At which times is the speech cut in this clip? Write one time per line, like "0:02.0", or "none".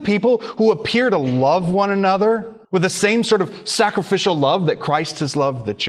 0:02.6